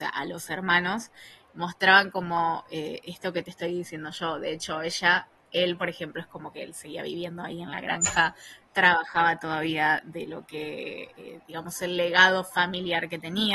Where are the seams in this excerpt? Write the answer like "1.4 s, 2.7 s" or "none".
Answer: none